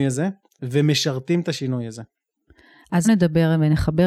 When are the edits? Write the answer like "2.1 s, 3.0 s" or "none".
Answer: 3.0 s